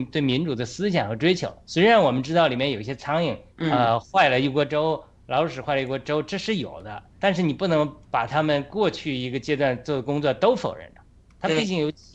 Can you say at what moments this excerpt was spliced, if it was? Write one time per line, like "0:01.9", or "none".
0:03.5
0:08.0